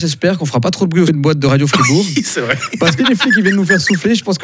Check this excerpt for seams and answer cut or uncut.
cut